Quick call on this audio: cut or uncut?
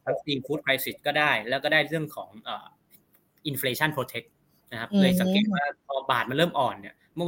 uncut